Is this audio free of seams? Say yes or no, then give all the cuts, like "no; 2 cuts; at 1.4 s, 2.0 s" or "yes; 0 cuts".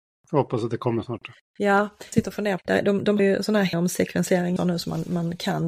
no; 5 cuts; at 2.1 s, 2.6 s, 3.2 s, 3.7 s, 4.6 s